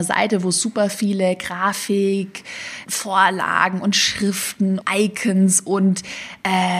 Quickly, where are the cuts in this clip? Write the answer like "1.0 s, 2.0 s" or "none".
2.8 s, 4.8 s